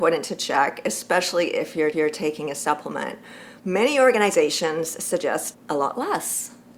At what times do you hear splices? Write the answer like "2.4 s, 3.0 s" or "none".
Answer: 1.9 s, 3.6 s, 5.5 s

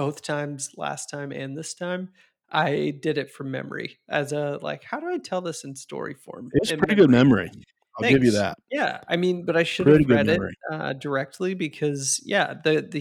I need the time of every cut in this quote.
none

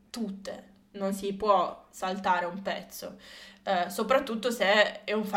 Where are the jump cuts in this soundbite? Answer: none

